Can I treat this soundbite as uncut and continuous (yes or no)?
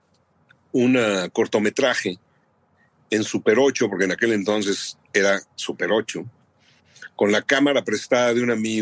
yes